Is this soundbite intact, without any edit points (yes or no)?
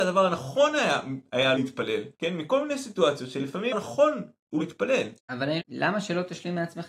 no